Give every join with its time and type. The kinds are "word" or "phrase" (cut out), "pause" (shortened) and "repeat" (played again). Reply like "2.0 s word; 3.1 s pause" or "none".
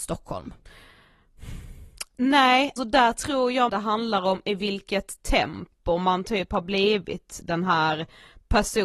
2.8 s word; 3.7 s word